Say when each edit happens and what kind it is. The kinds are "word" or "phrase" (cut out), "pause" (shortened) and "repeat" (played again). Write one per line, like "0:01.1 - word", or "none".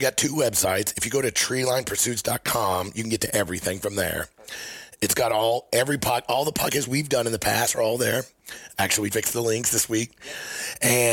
0:09.1 - word